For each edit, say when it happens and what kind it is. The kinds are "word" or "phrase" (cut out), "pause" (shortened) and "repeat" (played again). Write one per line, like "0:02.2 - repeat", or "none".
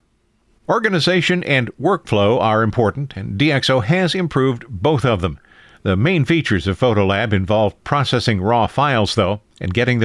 none

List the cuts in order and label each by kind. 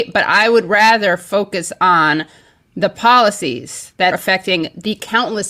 0:04.1 - word

